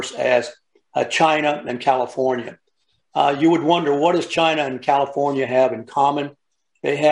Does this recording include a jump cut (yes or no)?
no